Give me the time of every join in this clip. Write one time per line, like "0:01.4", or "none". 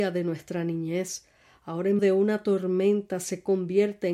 0:02.0